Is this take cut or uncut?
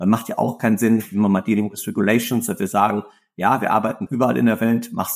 cut